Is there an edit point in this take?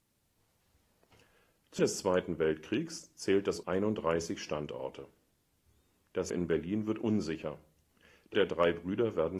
yes; 4 cuts; at 1.8 s, 3.6 s, 6.3 s, 8.3 s

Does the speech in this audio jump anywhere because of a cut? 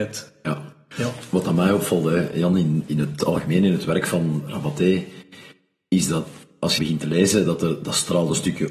yes; 1 cut; at 6.8 s

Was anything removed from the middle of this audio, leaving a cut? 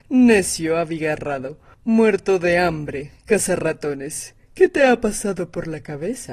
no; 0 cuts

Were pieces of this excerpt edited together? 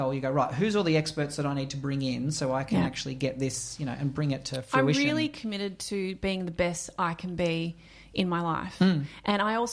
no; 0 cuts

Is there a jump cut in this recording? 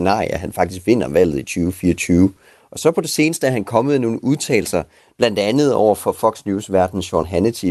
no; 0 cuts

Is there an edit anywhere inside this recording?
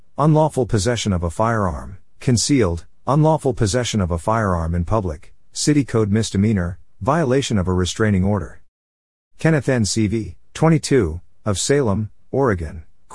no; 0 cuts

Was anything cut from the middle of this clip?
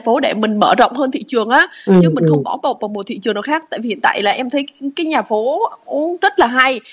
no; 0 cuts

